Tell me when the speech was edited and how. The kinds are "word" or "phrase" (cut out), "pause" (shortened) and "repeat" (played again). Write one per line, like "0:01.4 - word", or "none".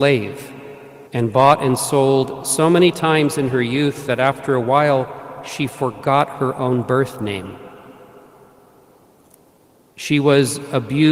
0:01.1 - pause